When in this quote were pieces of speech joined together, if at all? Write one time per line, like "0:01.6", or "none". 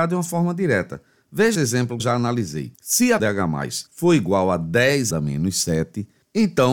0:01.5
0:02.0
0:02.7
0:03.2
0:03.9
0:05.1